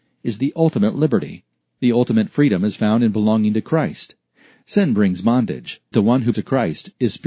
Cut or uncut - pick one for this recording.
cut